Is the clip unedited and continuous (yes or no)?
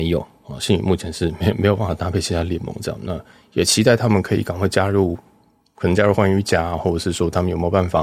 yes